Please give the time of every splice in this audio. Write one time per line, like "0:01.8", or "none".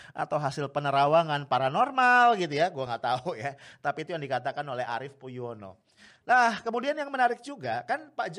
none